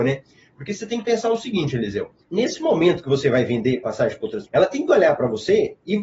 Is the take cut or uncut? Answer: cut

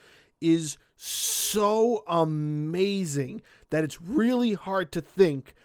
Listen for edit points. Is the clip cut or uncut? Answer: uncut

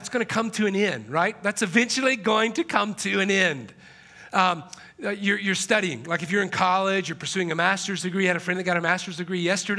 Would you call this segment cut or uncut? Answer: uncut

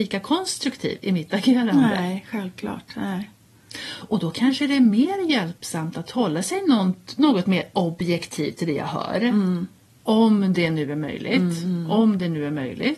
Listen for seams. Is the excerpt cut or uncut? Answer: uncut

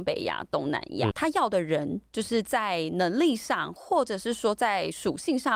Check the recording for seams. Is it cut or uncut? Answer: cut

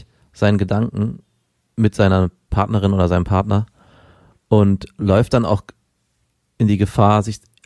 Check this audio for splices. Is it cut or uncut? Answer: uncut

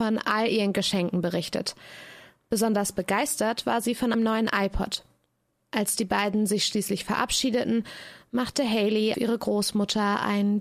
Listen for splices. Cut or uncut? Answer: cut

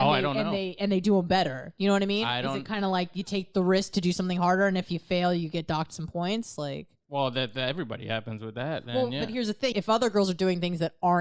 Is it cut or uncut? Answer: cut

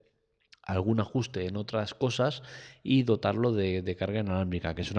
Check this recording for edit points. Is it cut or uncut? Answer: uncut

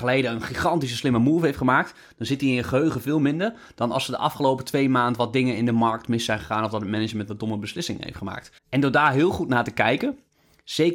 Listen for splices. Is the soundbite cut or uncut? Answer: cut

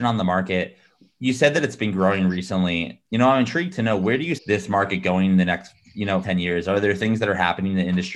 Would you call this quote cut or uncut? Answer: cut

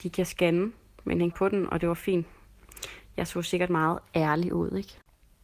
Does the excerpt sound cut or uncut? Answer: cut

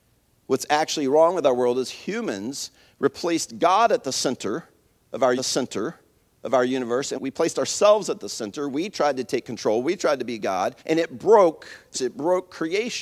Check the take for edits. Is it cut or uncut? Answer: cut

